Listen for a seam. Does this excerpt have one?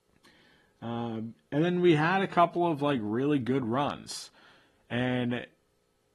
no; 0 cuts

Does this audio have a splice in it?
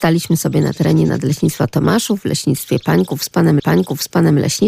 yes; 1 cut; at 3.6 s

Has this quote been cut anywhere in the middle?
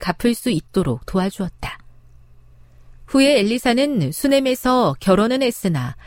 no; 0 cuts

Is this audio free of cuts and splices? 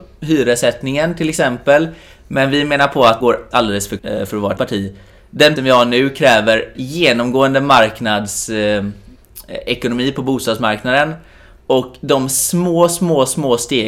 no; 6 cuts; at 3.2 s, 3.5 s, 4.0 s, 4.6 s, 5.6 s, 6.8 s

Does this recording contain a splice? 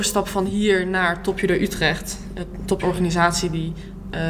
yes; 1 cut; at 2.8 s

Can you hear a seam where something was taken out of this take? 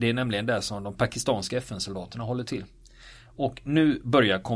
no; 0 cuts

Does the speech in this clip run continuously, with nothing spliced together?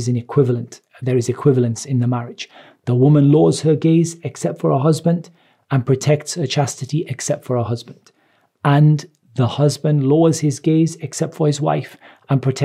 yes; 0 cuts

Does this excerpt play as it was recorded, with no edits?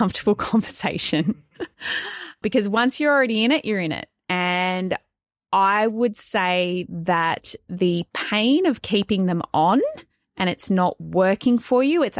yes; 0 cuts

